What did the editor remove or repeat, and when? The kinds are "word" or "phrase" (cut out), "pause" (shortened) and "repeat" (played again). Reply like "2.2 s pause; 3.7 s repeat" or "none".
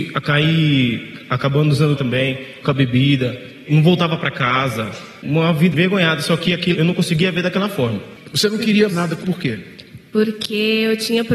2.0 s word; 2.6 s word; 5.7 s word; 6.7 s word; 8.9 s word; 9.2 s word